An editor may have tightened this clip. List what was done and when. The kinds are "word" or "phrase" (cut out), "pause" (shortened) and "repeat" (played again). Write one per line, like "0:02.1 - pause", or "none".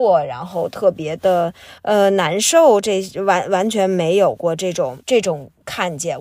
0:01.8 - pause
0:05.0 - pause

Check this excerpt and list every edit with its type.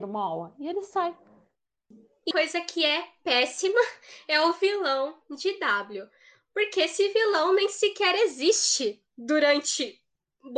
0:02.3 - word

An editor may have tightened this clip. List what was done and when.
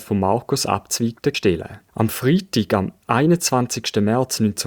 0:01.3 - phrase

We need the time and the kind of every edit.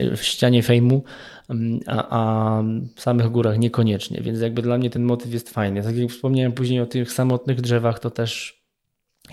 none

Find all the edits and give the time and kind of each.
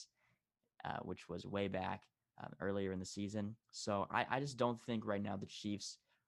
0:03.6 - pause

